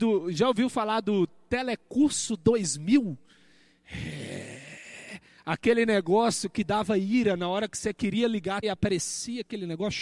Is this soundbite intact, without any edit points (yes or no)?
no